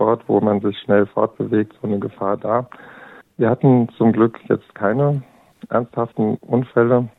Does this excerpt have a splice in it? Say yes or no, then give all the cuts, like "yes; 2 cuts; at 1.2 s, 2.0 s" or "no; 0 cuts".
yes; 1 cut; at 3.2 s